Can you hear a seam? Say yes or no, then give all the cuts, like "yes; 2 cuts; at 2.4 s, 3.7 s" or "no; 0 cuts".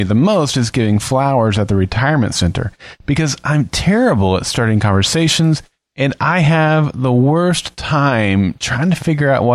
no; 0 cuts